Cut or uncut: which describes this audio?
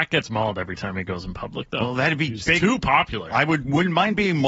cut